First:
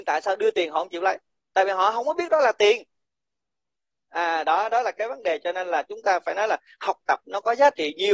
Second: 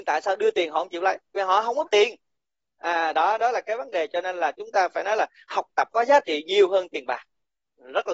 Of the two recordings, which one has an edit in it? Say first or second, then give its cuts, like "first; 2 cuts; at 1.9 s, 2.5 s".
second; 4 cuts; at 1.4 s, 1.9 s, 2.4 s, 5.9 s